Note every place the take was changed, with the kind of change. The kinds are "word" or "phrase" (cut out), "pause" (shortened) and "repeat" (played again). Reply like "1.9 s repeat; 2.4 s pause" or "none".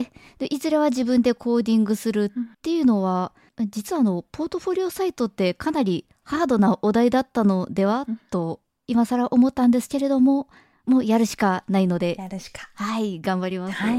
2.5 s pause; 3.5 s pause; 10.7 s pause

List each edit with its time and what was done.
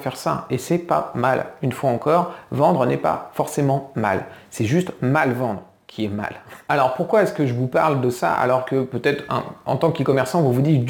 none

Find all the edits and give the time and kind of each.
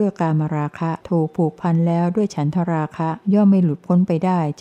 1.0 s pause; 3.2 s pause

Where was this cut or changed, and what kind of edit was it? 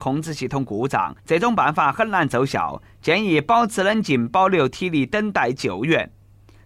1.2 s pause

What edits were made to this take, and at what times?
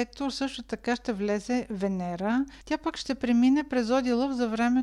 2.6 s pause

